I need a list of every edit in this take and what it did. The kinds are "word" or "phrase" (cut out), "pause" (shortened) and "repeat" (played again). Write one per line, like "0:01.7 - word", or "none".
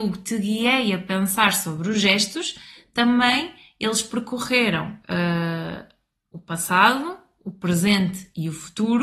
none